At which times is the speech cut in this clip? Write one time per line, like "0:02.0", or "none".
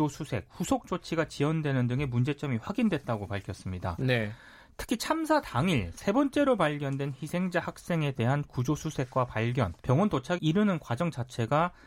0:09.8
0:10.4